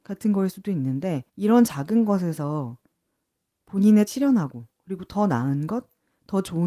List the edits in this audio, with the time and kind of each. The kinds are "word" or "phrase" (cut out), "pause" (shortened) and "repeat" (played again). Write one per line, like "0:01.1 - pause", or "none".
0:01.3 - pause
0:04.1 - word